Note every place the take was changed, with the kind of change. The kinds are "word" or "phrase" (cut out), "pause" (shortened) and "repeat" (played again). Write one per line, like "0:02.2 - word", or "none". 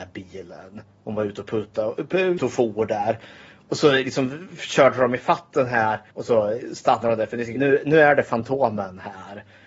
0:02.4 - word
0:06.1 - pause
0:07.6 - word

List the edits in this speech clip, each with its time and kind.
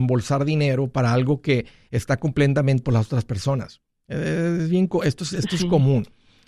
0:02.8 - word

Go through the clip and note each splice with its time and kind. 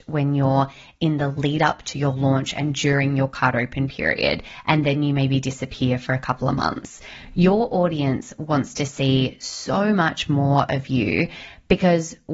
none

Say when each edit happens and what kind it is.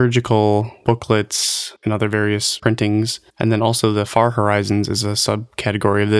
0:03.3 - pause

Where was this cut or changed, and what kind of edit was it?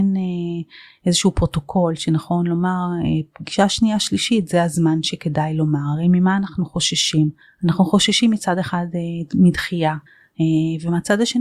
0:07.4 - pause
0:10.1 - pause

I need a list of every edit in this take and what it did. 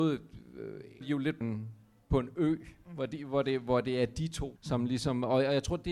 0:01.0 - word
0:01.4 - word
0:04.6 - word

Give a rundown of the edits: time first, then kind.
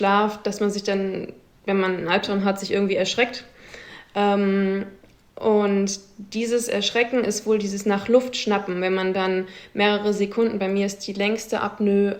none

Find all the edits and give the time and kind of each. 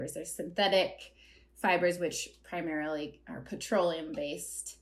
none

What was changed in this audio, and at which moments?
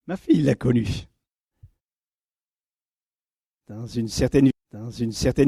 0:04.5 - repeat

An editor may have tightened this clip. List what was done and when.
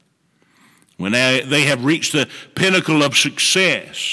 none

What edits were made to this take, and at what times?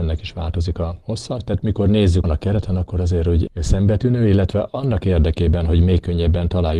0:02.2 - phrase
0:03.5 - word

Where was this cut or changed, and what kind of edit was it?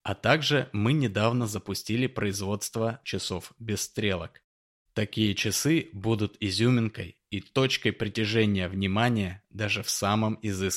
0:03.0 - word

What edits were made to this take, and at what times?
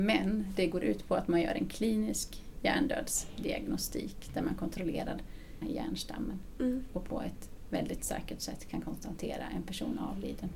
0:05.6 - word

